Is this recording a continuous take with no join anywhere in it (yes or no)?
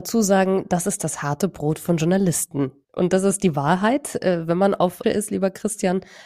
no